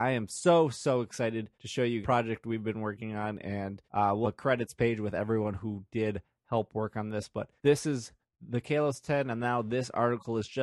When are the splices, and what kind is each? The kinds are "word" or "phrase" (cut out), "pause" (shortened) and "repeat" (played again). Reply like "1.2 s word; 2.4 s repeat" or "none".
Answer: 1.5 s pause; 2.0 s phrase; 3.8 s pause; 4.2 s word; 7.6 s pause; 8.2 s pause